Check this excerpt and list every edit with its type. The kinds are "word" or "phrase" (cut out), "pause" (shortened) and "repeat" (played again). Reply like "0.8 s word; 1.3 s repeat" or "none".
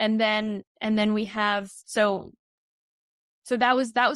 none